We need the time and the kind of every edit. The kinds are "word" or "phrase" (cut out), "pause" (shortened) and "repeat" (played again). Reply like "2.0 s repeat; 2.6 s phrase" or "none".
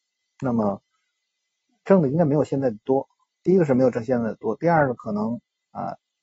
none